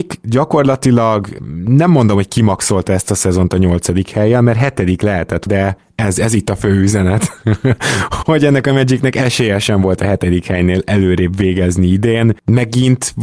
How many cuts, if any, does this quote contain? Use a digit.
2